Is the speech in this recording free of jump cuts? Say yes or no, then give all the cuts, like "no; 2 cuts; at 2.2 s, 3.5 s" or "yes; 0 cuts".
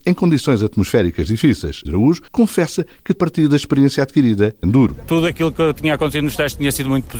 no; 4 cuts; at 1.9 s, 2.3 s, 3.2 s, 4.6 s